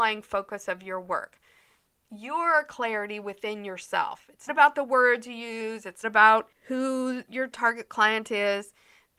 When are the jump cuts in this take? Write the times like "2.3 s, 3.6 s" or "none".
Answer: 4.5 s, 6.0 s